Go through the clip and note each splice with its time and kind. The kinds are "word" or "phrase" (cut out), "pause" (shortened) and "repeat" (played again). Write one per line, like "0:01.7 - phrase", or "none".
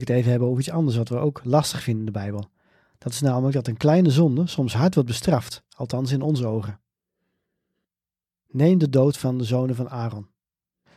none

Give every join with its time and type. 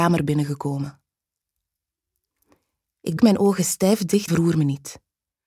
0:03.2 - word
0:04.3 - word

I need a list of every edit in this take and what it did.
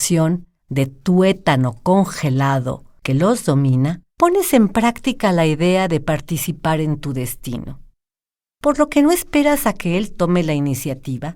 0:04.1 - pause

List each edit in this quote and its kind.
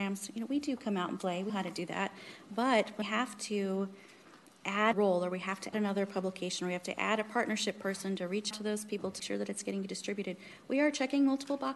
0:01.5 - word
0:03.0 - word
0:04.9 - word
0:05.7 - word
0:08.5 - word
0:09.2 - word

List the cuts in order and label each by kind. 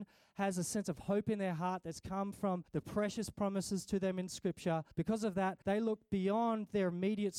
0:02.7 - pause
0:04.9 - pause
0:05.6 - pause

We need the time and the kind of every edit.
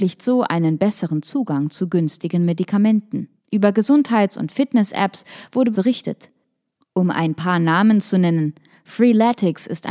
0:03.4 - pause
0:05.7 - word

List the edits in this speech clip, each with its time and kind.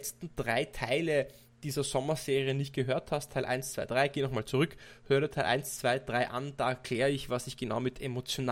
none

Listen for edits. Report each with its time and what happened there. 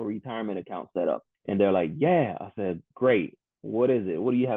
0:02.9 - pause

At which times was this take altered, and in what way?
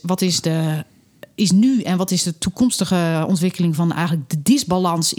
none

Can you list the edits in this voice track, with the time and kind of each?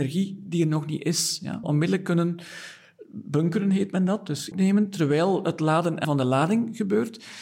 0:01.6 - phrase
0:04.5 - phrase
0:06.0 - word

